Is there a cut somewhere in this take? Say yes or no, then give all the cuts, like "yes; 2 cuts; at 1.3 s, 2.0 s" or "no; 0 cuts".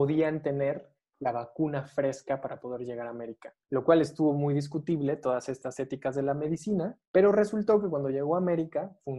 yes; 2 cuts; at 3.6 s, 7.0 s